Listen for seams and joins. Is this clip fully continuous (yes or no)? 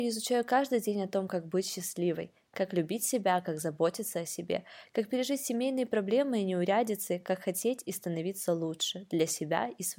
yes